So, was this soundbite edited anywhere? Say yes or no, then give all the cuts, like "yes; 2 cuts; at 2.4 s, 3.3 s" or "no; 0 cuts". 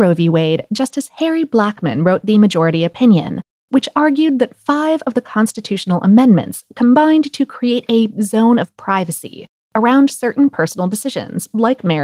no; 0 cuts